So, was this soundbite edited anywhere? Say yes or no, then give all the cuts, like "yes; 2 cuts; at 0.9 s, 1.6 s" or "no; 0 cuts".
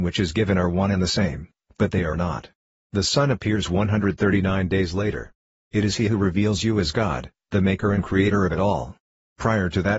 no; 0 cuts